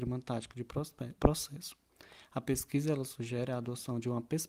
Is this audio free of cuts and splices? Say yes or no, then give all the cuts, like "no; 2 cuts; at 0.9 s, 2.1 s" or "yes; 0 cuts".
no; 1 cut; at 1.2 s